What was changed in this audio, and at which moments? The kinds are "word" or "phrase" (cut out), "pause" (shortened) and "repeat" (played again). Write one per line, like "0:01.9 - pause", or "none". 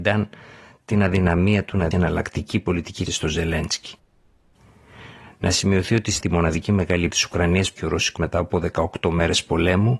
0:01.9 - word
0:03.1 - word
0:06.2 - word
0:07.1 - word
0:07.8 - word
0:08.2 - word